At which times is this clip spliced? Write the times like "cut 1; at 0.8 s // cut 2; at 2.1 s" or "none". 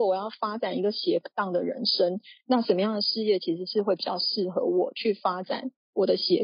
none